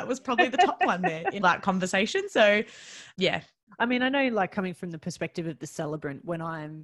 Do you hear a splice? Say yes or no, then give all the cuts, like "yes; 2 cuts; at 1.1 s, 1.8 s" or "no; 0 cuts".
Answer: yes; 2 cuts; at 1.4 s, 3.1 s